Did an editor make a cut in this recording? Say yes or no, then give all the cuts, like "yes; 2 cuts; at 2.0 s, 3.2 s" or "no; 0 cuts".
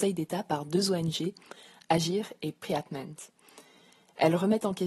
no; 0 cuts